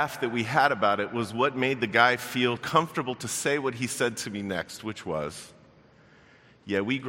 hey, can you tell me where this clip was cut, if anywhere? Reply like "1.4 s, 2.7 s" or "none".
2.6 s